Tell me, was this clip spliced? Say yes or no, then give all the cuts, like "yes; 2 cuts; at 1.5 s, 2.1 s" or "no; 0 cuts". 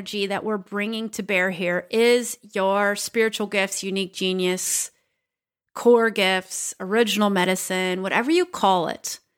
no; 0 cuts